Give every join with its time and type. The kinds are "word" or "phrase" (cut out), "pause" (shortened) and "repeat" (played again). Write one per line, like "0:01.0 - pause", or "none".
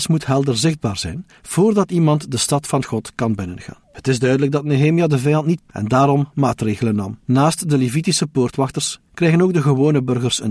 0:03.8 - pause
0:05.6 - word
0:07.2 - pause